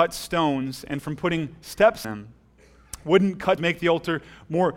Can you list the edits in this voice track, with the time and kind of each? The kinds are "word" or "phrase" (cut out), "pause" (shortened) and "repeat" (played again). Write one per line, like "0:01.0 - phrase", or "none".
0:02.0 - word
0:03.6 - word

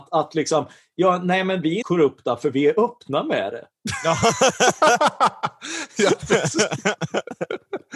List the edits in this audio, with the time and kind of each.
0:01.8 - word

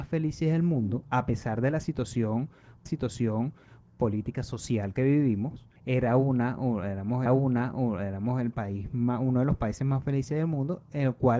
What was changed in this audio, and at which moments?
0:02.9 - repeat
0:05.8 - pause
0:07.3 - repeat

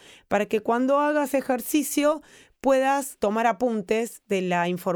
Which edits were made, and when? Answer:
0:01.3 - word
0:03.2 - word

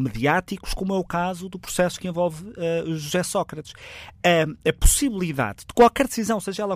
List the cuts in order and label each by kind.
none

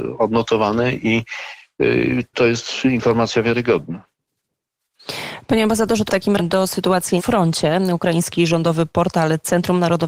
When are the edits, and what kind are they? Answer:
0:02.3 - word
0:06.1 - word
0:06.4 - word
0:07.2 - word

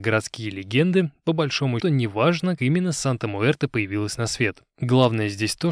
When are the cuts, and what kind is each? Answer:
0:01.8 - word
0:02.6 - word

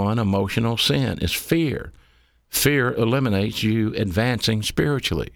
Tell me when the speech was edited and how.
none

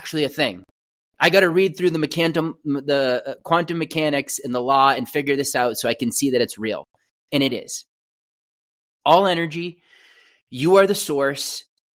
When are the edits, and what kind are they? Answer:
none

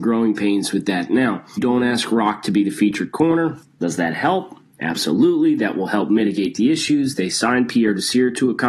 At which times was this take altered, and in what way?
0:01.6 - phrase
0:03.6 - pause

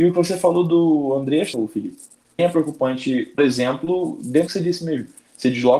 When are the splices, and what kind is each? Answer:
0:01.5 - word
0:02.4 - word
0:03.4 - word
0:04.5 - word

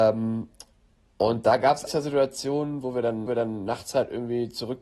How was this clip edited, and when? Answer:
0:01.9 - word
0:03.3 - repeat

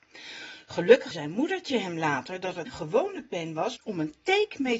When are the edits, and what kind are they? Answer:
0:01.1 - word
0:02.7 - word
0:03.8 - phrase

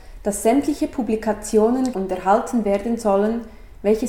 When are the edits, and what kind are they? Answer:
0:01.9 - word

